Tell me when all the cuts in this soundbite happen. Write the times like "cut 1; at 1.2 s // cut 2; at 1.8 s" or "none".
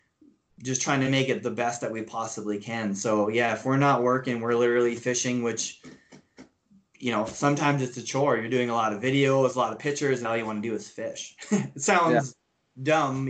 cut 1; at 10.2 s

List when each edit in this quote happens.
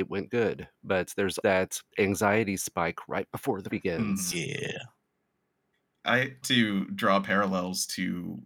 cut 1; at 1.4 s // cut 2; at 1.9 s // cut 3; at 3.7 s // cut 4; at 6.4 s

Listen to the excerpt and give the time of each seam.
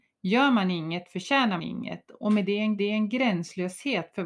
cut 1; at 1.6 s // cut 2; at 2.8 s

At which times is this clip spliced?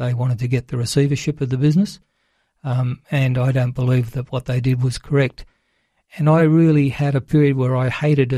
none

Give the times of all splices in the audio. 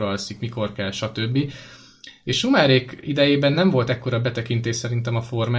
none

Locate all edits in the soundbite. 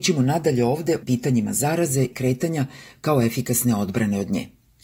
cut 1; at 1.0 s // cut 2; at 2.1 s

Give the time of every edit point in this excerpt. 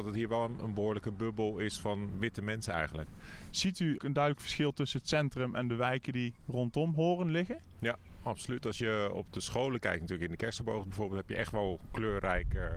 cut 1; at 2.1 s // cut 2; at 4.0 s

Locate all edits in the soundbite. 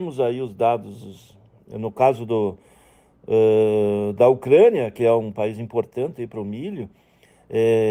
none

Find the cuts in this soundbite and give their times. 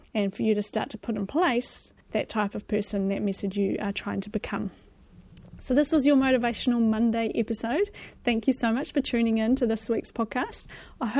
cut 1; at 2.0 s

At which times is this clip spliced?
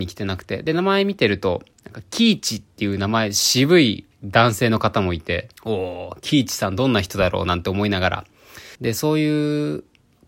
cut 1; at 1.7 s // cut 2; at 5.6 s // cut 3; at 8.7 s

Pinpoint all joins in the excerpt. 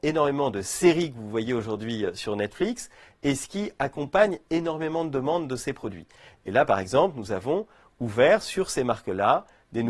none

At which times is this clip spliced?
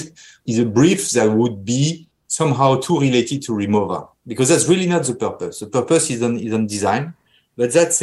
none

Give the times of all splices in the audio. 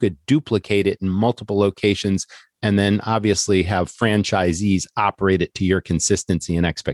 none

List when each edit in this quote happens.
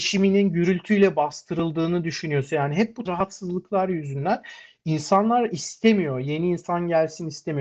cut 1; at 3.1 s

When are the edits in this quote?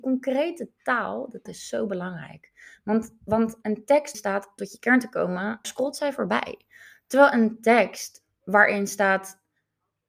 cut 1; at 1.5 s // cut 2; at 3.6 s // cut 3; at 4.1 s // cut 4; at 4.6 s // cut 5; at 5.6 s

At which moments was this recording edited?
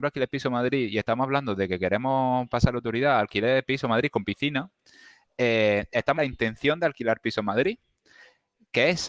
cut 1; at 6.2 s

